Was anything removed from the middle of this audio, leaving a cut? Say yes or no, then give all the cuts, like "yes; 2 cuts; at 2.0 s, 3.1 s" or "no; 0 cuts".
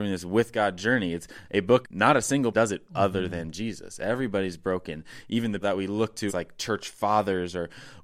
yes; 5 cuts; at 1.8 s, 2.5 s, 2.9 s, 5.6 s, 6.3 s